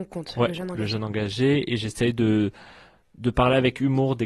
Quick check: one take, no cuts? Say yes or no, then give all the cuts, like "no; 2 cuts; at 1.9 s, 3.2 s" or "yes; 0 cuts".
yes; 0 cuts